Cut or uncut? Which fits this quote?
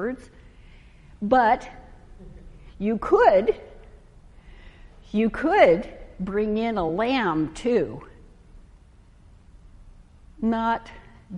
uncut